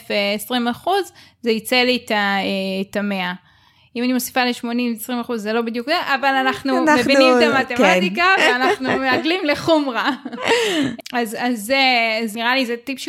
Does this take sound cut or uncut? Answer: uncut